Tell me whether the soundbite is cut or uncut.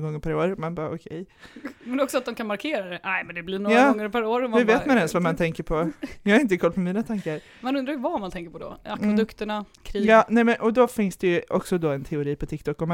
cut